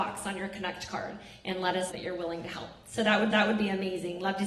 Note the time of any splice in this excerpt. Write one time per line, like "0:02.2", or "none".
0:01.9
0:03.3